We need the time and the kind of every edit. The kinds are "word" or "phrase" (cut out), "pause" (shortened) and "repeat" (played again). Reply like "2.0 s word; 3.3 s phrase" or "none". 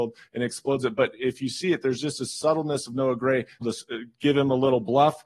3.6 s phrase